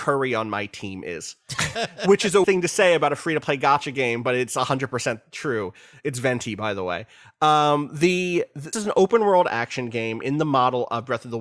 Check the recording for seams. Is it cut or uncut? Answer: cut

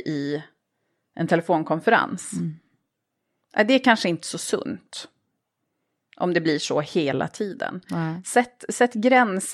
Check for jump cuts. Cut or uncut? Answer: uncut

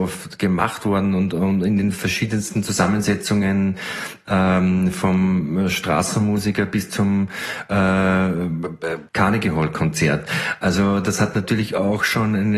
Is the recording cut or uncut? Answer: cut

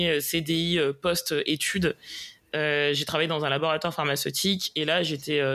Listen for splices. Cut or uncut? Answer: uncut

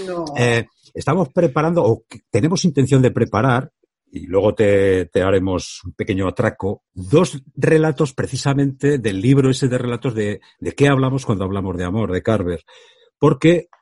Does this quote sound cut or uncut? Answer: cut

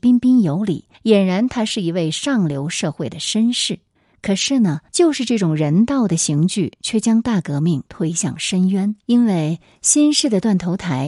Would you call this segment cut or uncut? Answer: cut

